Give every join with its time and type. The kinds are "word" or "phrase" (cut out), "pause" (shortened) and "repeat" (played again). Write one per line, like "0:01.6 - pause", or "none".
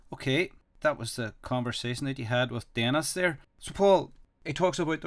0:03.5 - pause